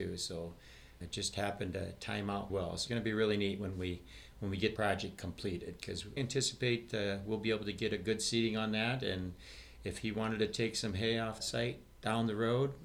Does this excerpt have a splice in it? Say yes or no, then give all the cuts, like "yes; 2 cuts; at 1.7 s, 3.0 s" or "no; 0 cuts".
yes; 6 cuts; at 1.0 s, 2.5 s, 2.9 s, 4.8 s, 6.2 s, 11.4 s